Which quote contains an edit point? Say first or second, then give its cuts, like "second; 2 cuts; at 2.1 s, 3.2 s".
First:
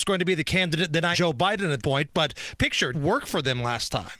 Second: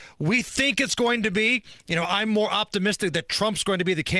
first; 4 cuts; at 1.1 s, 1.8 s, 2.6 s, 2.9 s